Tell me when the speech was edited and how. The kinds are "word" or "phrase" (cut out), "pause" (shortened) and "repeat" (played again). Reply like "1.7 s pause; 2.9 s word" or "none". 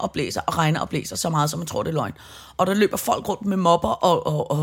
none